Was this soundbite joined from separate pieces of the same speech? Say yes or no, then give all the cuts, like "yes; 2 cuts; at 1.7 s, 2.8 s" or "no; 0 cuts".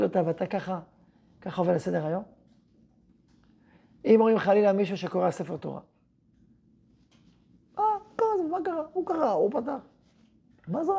no; 0 cuts